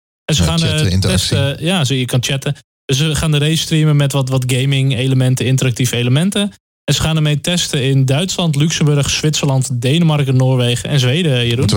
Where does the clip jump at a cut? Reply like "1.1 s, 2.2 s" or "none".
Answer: none

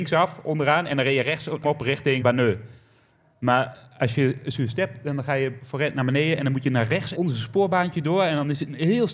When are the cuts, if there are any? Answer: 1.6 s, 2.2 s, 7.1 s

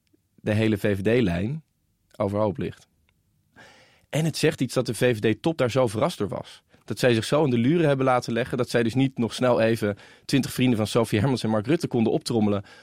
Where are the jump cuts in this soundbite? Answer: none

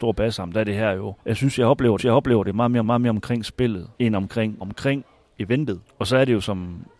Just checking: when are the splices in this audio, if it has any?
1.2 s, 2.0 s, 2.8 s, 3.9 s, 4.6 s, 5.8 s

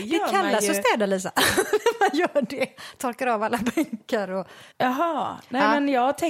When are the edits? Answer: 4.7 s

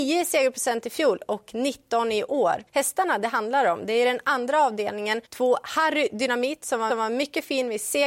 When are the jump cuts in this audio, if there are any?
2.7 s, 5.2 s, 6.9 s

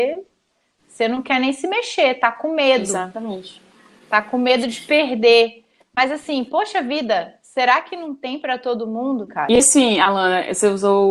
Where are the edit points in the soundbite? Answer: none

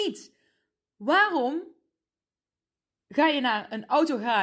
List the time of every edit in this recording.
none

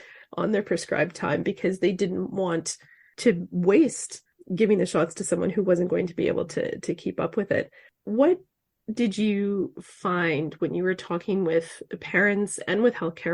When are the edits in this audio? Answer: none

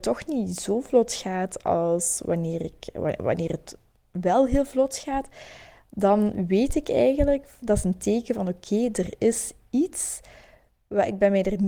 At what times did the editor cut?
none

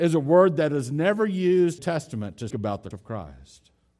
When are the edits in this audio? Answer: 1.8 s, 2.5 s, 2.9 s

